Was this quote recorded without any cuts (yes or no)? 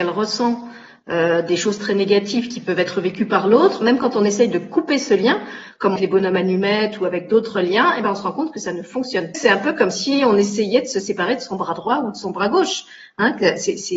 no